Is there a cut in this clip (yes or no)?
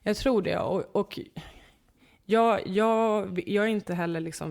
no